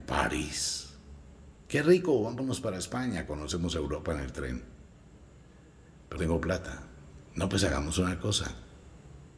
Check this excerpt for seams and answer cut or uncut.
cut